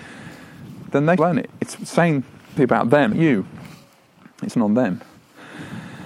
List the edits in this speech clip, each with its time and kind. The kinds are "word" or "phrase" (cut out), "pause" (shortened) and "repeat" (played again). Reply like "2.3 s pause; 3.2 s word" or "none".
1.2 s word; 2.6 s word; 3.1 s word; 4.5 s word